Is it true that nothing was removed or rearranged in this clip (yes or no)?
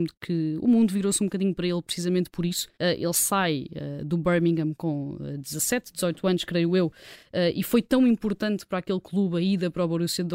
no